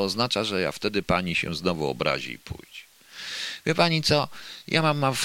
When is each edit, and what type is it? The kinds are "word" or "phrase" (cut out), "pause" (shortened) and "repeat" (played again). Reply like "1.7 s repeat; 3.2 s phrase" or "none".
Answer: none